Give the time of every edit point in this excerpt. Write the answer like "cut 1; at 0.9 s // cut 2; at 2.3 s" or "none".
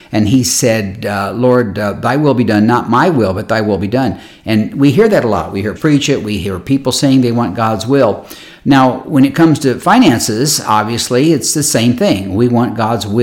cut 1; at 5.8 s